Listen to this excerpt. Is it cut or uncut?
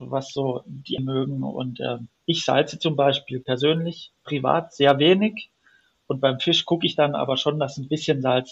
cut